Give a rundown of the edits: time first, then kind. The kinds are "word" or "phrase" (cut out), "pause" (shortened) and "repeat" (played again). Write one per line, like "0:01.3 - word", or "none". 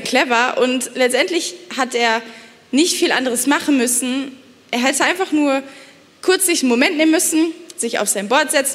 none